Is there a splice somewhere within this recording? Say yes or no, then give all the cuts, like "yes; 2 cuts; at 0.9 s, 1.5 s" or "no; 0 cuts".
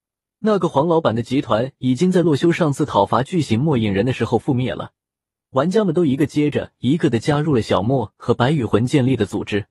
no; 0 cuts